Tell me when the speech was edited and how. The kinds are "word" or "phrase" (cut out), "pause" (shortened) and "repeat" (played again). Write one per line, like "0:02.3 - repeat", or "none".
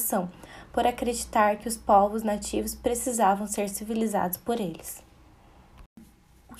none